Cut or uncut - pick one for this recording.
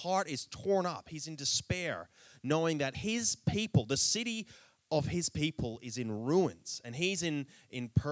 uncut